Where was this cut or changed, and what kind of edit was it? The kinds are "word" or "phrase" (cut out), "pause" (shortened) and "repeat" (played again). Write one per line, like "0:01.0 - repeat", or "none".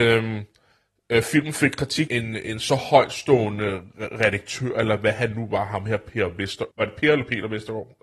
0:02.1 - phrase
0:06.7 - pause